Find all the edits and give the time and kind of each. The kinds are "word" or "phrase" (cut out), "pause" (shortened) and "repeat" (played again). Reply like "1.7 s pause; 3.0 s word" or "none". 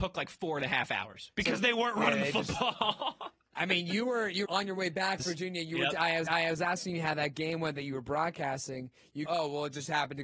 4.5 s word; 5.2 s phrase; 6.3 s repeat; 9.3 s word